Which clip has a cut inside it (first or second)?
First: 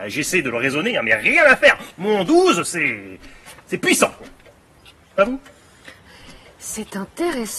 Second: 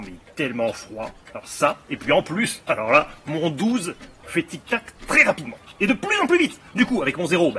second